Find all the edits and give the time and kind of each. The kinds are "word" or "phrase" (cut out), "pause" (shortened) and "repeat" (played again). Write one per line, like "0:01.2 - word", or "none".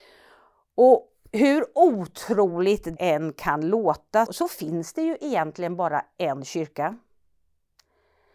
0:03.0 - word
0:04.3 - word